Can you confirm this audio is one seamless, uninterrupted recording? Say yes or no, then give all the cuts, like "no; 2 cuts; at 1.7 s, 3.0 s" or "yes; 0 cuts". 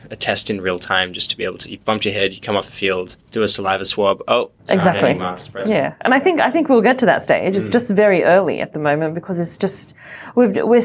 no; 2 cuts; at 3.2 s, 4.6 s